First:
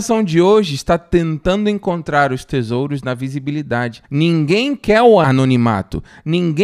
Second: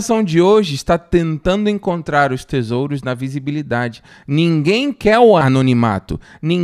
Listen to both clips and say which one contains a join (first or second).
first